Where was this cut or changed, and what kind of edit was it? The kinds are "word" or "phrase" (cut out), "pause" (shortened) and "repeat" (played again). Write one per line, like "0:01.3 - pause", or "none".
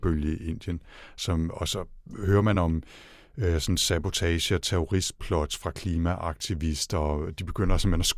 none